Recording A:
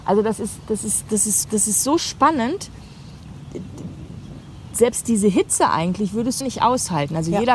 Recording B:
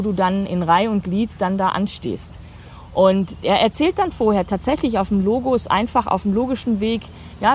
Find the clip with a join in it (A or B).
A